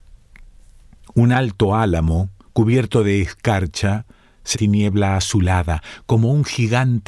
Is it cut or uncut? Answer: cut